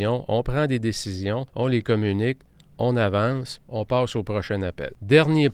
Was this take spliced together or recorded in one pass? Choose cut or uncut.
cut